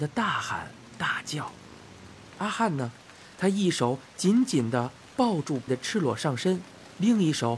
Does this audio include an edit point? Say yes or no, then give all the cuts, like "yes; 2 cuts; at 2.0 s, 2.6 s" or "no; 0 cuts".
yes; 1 cut; at 5.7 s